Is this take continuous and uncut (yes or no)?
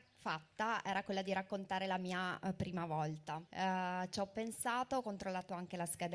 no